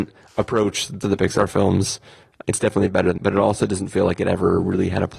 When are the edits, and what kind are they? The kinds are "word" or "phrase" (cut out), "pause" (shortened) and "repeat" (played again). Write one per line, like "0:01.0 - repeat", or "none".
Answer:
0:01.0 - word
0:02.4 - word
0:03.2 - word